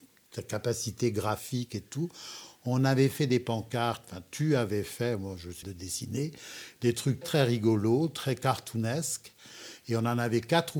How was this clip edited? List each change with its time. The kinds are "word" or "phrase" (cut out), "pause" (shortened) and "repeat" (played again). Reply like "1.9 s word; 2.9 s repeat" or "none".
5.6 s word; 7.2 s word

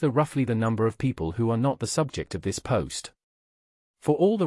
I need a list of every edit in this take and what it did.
none

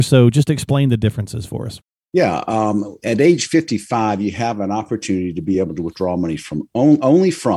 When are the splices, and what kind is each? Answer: none

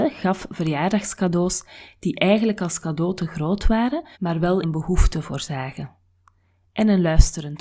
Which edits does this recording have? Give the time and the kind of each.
4.1 s pause; 4.6 s word

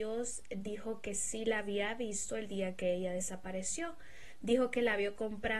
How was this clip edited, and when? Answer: none

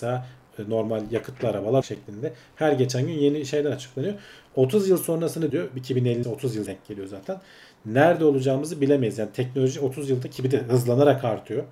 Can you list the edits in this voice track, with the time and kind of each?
1.8 s word; 5.5 s word; 6.2 s word; 6.7 s word

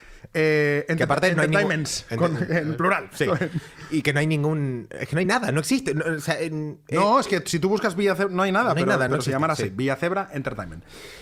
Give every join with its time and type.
none

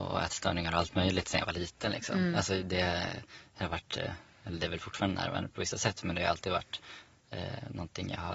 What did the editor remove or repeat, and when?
none

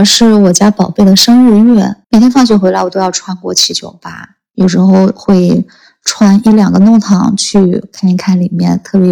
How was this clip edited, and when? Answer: 2.0 s pause

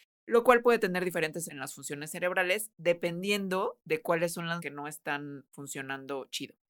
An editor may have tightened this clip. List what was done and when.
1.5 s word; 4.6 s word

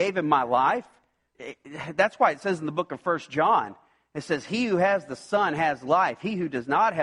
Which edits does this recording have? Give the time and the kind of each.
1.3 s word

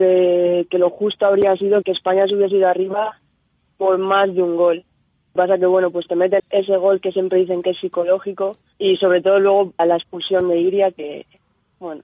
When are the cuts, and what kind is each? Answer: 1.8 s word; 5.4 s word; 6.4 s word; 8.7 s word; 9.8 s word

